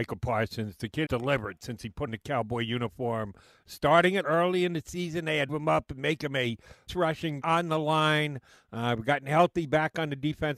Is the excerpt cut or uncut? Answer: cut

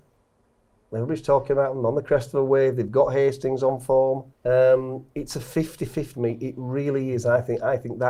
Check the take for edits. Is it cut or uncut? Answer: cut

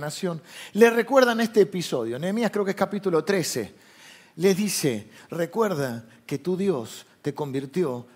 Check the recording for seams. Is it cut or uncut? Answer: uncut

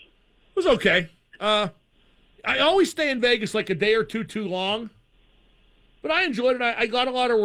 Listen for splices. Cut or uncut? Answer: uncut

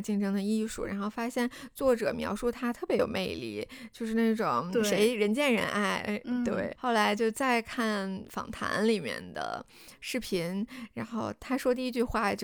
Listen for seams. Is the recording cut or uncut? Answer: cut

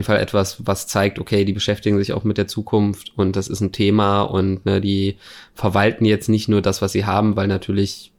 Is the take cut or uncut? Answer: uncut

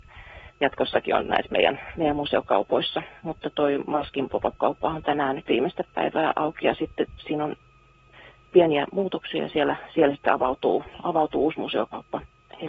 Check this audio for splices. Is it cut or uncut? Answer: uncut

